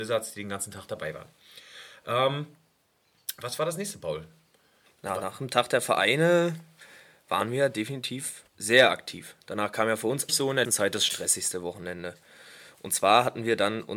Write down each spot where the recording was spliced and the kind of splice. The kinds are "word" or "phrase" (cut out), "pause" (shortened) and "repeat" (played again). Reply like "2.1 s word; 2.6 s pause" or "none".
8.5 s pause; 10.3 s word; 10.6 s word